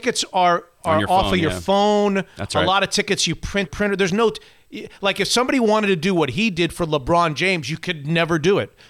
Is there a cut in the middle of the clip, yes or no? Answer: yes